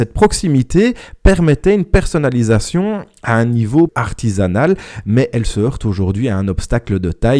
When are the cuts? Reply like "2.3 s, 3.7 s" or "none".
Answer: 3.9 s